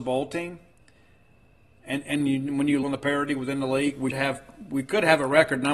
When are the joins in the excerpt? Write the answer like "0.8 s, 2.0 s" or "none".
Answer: 2.8 s, 4.1 s